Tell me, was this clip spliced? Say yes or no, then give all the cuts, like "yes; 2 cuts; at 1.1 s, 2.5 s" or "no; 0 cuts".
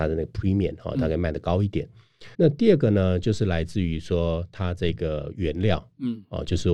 yes; 1 cut; at 2.3 s